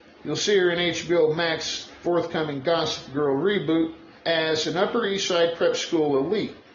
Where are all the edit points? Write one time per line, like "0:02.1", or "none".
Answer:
0:04.2